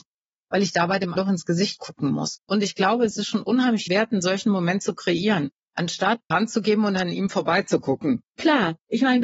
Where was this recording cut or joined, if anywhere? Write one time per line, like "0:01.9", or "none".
0:01.2
0:02.4
0:03.9
0:06.3